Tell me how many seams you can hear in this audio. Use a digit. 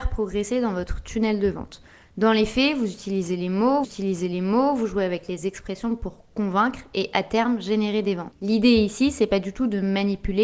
1